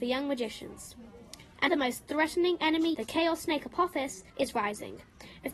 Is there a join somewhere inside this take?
yes; 3 cuts; at 1.7 s, 2.9 s, 4.3 s

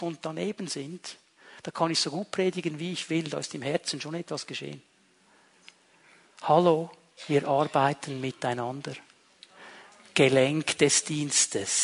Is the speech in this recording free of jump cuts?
yes; 0 cuts

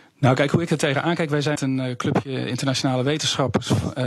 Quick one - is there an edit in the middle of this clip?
yes; 1 cut; at 1.6 s

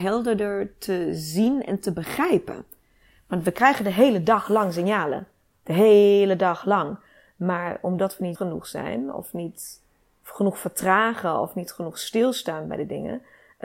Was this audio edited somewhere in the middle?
yes; 1 cut; at 8.4 s

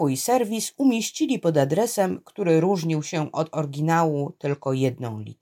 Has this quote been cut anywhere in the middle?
no; 0 cuts

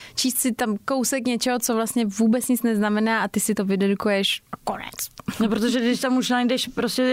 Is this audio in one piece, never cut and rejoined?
no; 1 cut; at 4.5 s

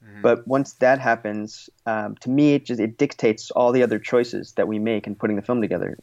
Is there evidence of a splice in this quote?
no; 0 cuts

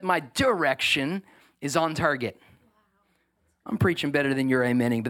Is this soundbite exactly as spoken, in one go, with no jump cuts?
yes; 0 cuts

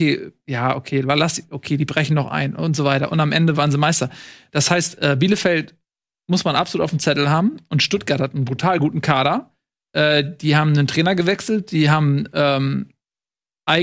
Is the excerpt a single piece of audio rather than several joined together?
yes; 0 cuts

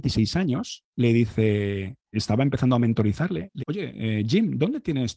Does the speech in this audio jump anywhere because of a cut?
yes; 2 cuts; at 2.1 s, 3.6 s

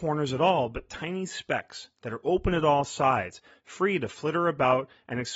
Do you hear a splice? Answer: no; 0 cuts

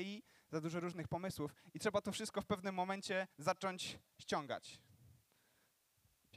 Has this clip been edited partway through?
yes; 1 cut; at 3.3 s

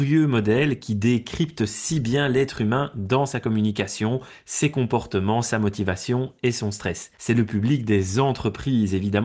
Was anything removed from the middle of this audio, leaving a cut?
yes; 1 cut; at 7.1 s

